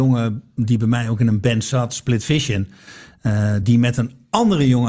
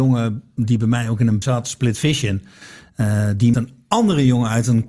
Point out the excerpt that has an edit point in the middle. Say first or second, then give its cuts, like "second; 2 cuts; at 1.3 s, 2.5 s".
second; 2 cuts; at 1.4 s, 3.5 s